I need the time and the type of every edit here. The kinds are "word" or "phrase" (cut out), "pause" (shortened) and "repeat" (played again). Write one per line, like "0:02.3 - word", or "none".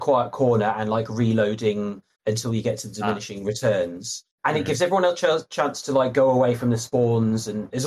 0:02.1 - pause
0:04.3 - pause